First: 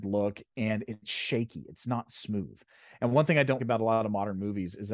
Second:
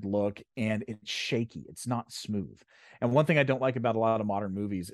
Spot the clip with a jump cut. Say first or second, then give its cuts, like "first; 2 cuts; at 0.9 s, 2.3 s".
first; 1 cut; at 3.6 s